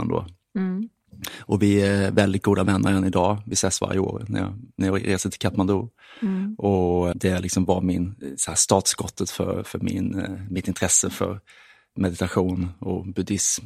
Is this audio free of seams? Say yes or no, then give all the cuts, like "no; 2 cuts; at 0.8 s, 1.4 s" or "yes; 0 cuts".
no; 1 cut; at 7.1 s